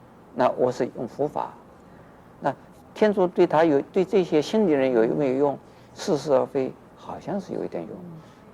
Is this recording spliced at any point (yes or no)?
no